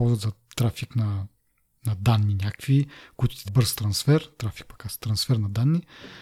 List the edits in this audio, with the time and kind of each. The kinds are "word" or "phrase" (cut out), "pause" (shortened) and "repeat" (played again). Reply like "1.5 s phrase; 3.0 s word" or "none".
3.4 s word

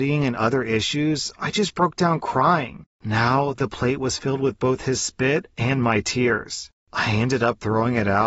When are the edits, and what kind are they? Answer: none

